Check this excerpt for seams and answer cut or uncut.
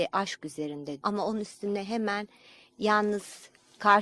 cut